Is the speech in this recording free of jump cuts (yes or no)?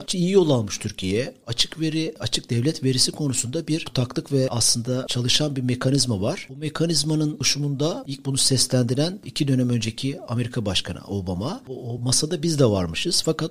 yes